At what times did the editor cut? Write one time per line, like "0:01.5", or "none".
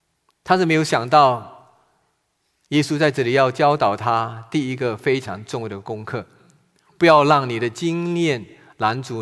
none